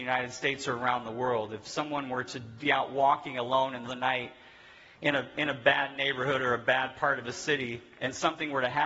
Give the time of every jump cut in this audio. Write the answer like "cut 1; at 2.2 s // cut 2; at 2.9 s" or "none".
cut 1; at 2.6 s // cut 2; at 3.8 s

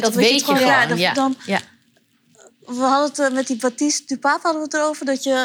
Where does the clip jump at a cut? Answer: none

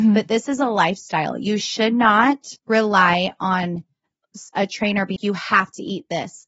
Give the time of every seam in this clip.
cut 1; at 2.6 s // cut 2; at 5.2 s

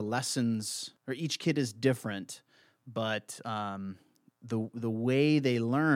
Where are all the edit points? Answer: cut 1; at 1.0 s

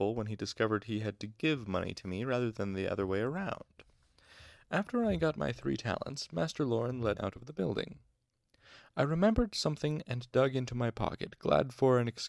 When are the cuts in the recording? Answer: cut 1; at 7.2 s

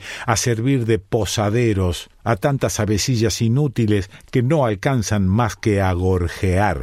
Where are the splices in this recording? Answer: cut 1; at 2.1 s

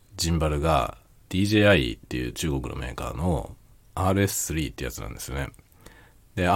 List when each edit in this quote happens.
none

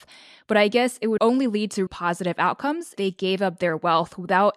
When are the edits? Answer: cut 1; at 1.2 s // cut 2; at 1.9 s // cut 3; at 3.0 s

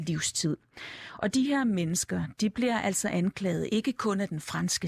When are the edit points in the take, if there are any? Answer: none

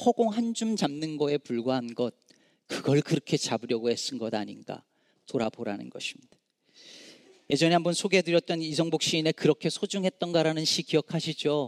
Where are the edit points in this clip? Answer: none

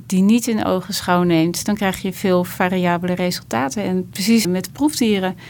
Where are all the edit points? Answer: cut 1; at 4.4 s

